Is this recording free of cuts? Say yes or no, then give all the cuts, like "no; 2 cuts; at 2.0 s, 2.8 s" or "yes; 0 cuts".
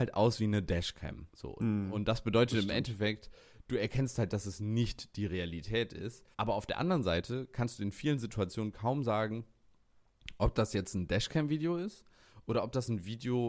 no; 2 cuts; at 1.3 s, 6.3 s